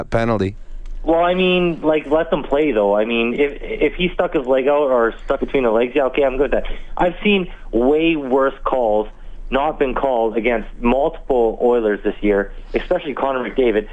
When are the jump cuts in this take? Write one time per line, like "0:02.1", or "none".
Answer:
0:05.4